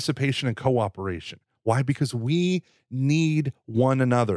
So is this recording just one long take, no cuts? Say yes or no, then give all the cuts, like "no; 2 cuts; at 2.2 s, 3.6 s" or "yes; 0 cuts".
yes; 0 cuts